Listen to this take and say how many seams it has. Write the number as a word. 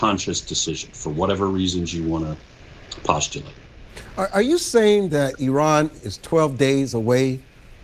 zero